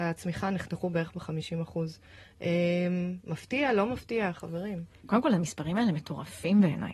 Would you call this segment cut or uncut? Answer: uncut